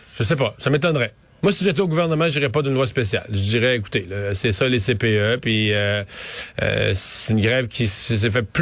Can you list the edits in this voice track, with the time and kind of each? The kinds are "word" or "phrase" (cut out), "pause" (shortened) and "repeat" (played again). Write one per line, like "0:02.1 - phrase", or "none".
0:01.2 - pause